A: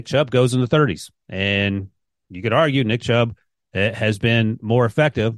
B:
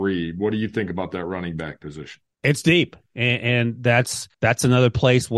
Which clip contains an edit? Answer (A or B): B